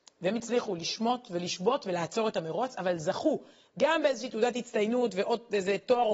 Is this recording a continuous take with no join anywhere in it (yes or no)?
yes